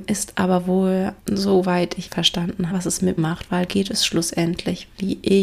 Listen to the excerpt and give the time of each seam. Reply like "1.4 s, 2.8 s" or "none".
1.2 s, 2.1 s, 2.7 s, 3.2 s, 3.7 s